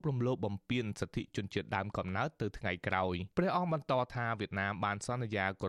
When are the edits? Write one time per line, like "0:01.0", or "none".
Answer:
0:03.3